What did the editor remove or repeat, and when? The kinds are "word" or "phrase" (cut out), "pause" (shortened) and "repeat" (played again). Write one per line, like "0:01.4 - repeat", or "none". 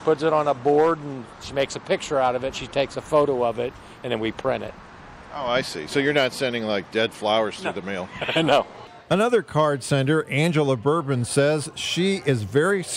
0:02.5 - word